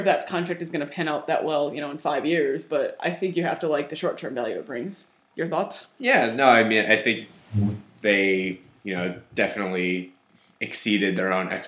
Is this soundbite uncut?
yes; 0 cuts

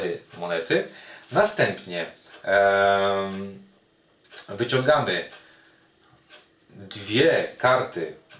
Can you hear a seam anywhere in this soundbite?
no; 0 cuts

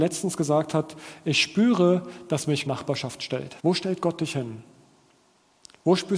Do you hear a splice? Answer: yes; 2 cuts; at 2.7 s, 3.6 s

